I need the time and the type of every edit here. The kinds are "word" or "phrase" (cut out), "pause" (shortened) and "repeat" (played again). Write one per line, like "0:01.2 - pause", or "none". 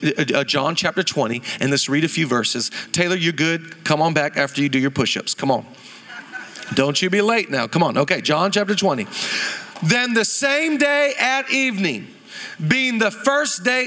none